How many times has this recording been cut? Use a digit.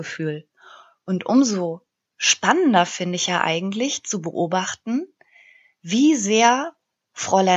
0